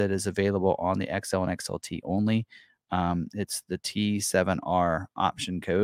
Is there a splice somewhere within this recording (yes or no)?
no